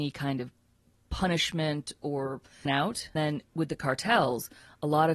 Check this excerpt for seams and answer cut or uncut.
cut